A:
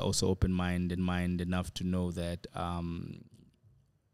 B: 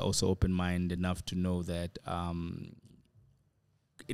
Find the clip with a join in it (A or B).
A